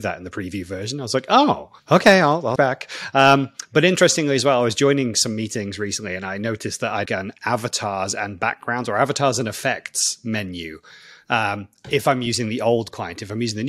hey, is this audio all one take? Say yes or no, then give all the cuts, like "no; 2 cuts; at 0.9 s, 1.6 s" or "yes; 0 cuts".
no; 3 cuts; at 1.8 s, 2.6 s, 7.1 s